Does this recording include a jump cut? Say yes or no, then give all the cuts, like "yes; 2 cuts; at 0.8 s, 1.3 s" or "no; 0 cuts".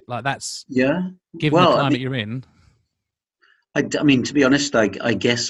no; 0 cuts